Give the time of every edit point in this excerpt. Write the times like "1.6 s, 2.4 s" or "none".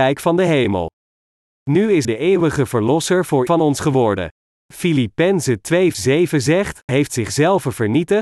2.0 s, 3.5 s, 5.9 s, 6.9 s